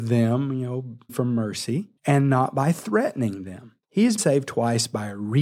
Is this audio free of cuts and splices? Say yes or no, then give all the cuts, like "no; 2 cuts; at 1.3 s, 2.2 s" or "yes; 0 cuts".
no; 4 cuts; at 1.1 s, 2.0 s, 3.8 s, 4.2 s